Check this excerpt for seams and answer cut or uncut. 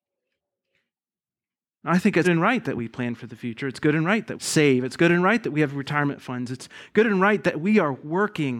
cut